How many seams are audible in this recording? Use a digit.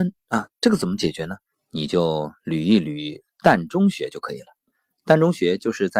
2